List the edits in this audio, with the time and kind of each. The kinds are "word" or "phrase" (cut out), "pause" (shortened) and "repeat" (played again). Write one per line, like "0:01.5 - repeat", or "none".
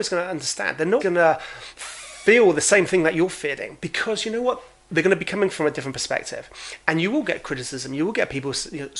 0:01.0 - word